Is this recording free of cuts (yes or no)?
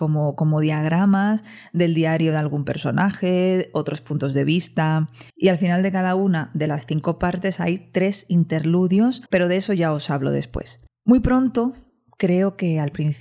no